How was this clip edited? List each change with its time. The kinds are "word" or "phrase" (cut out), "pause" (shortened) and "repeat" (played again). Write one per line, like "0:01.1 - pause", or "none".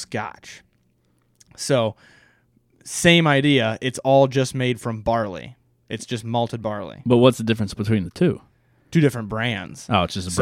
none